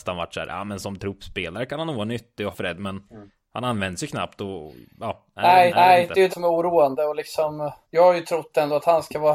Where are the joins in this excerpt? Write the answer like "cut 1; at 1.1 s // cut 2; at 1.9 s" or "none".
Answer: cut 1; at 2.5 s // cut 2; at 3.0 s // cut 3; at 5.7 s // cut 4; at 6.3 s // cut 5; at 7.8 s